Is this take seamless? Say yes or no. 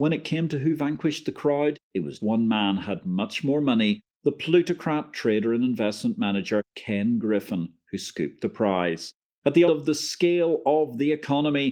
no